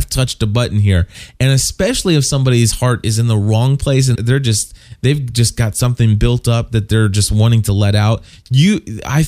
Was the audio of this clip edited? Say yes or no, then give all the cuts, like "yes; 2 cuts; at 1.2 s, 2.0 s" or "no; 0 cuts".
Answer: yes; 1 cut; at 4.1 s